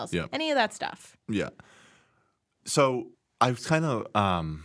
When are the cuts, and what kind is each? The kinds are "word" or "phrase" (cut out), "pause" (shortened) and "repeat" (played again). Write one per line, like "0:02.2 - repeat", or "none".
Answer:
0:01.2 - pause
0:03.1 - pause